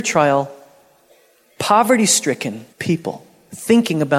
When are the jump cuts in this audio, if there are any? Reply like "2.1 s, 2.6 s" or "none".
2.7 s